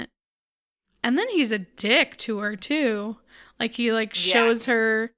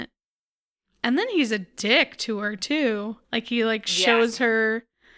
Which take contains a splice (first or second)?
second